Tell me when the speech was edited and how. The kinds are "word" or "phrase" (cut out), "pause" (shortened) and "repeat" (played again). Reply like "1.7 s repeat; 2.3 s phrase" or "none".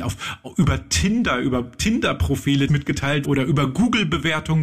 2.7 s word; 3.2 s word